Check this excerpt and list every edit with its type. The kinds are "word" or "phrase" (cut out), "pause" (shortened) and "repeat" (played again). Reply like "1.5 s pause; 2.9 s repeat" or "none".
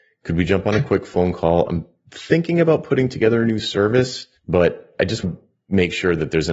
4.4 s pause; 5.2 s word